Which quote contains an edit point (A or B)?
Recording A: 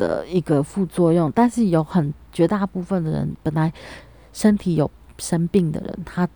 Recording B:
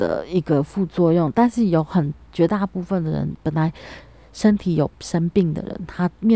B